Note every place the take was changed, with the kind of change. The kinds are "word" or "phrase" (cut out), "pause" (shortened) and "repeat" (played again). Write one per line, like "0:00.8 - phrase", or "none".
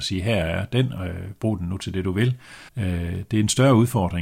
0:02.7 - pause